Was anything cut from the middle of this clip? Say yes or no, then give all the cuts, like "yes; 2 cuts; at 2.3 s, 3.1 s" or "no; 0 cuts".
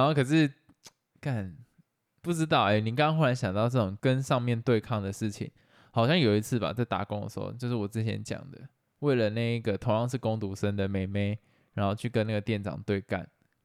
no; 0 cuts